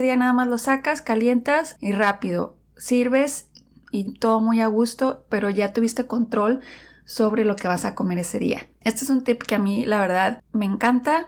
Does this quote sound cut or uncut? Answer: uncut